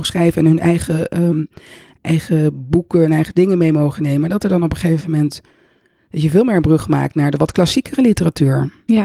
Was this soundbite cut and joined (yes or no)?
no